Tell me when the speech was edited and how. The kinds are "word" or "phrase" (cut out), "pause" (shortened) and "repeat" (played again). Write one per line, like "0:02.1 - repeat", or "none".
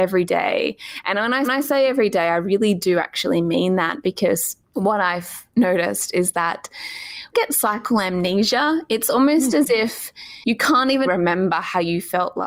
0:01.4 - repeat
0:04.6 - pause
0:07.3 - phrase
0:11.0 - word